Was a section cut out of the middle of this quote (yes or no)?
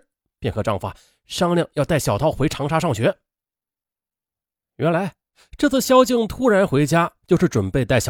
no